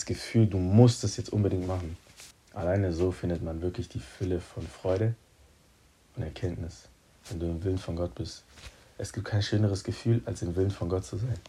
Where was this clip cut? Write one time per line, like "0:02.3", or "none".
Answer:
none